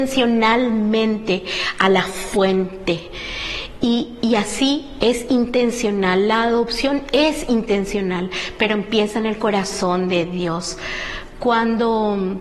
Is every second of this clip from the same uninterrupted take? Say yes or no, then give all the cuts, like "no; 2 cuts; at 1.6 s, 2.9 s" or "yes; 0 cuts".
yes; 0 cuts